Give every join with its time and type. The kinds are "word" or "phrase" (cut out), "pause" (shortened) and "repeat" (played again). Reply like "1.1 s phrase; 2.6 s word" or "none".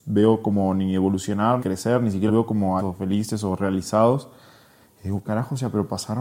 1.6 s word; 2.3 s word; 2.8 s word; 5.2 s word